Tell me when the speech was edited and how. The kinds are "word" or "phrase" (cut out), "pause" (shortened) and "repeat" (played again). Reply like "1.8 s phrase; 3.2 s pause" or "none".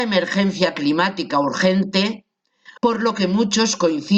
2.8 s pause